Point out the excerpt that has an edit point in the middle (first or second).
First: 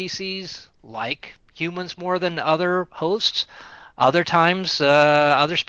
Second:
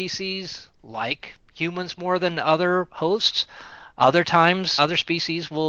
second